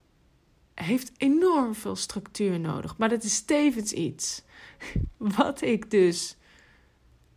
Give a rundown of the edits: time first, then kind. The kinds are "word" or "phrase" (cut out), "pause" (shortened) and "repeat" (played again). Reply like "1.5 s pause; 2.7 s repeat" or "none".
none